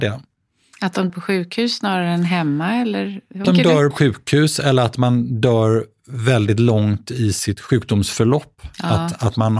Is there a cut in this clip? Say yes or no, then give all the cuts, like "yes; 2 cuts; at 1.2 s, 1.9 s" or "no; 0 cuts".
yes; 3 cuts; at 1.1 s, 3.4 s, 3.9 s